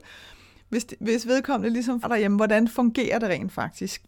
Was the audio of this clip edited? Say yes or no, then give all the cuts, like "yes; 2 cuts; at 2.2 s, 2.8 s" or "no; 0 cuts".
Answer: yes; 1 cut; at 2.0 s